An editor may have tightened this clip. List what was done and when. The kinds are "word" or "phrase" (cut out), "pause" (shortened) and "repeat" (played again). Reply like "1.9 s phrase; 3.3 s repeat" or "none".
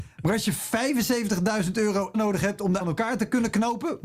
2.1 s word; 2.8 s word